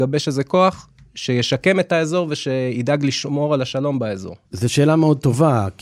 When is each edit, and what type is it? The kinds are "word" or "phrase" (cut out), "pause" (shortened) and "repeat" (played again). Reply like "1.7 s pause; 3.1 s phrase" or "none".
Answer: 4.4 s pause